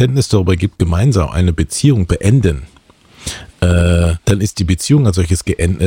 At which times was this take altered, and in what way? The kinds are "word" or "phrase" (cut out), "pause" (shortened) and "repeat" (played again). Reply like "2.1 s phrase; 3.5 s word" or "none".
2.1 s word; 4.2 s pause